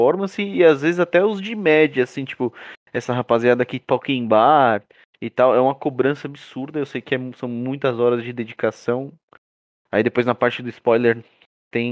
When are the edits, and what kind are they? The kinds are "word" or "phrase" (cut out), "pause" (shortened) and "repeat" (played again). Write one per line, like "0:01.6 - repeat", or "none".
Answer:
none